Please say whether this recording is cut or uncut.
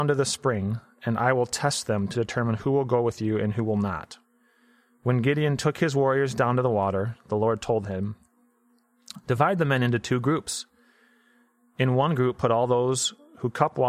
uncut